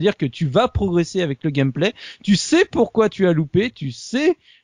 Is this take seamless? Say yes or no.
yes